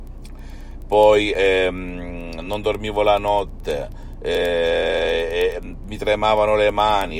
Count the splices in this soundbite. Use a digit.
0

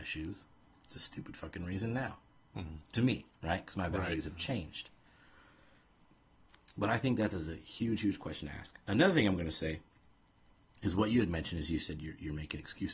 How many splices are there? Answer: 0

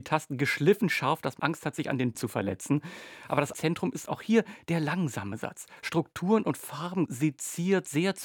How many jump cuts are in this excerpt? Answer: 4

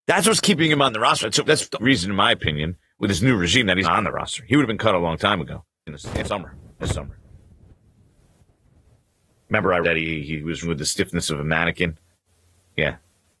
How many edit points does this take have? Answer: 8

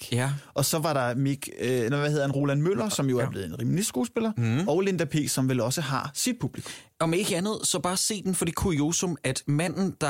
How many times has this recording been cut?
1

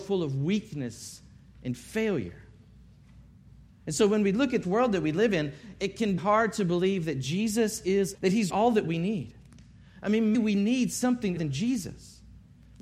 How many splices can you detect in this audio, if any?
6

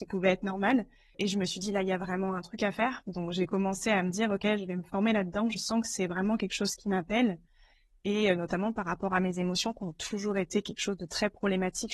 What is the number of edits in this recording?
0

